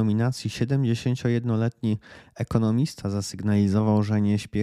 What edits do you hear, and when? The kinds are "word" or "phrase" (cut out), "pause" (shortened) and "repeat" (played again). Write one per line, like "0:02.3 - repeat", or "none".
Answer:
none